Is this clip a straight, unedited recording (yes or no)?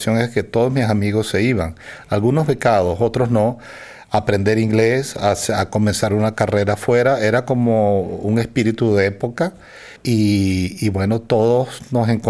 no